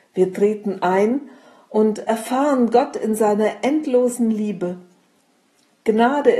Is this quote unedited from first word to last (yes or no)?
yes